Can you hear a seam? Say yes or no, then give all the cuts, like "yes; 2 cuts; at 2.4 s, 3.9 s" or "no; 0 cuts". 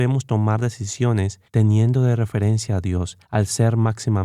yes; 2 cuts; at 1.5 s, 3.2 s